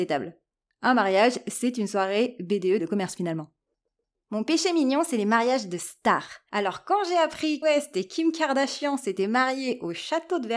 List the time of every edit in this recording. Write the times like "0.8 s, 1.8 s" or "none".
2.8 s, 7.6 s